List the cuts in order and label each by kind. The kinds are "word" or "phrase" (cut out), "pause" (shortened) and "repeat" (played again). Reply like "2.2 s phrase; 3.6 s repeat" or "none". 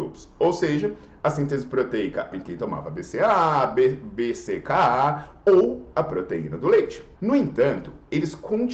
2.3 s word; 7.2 s pause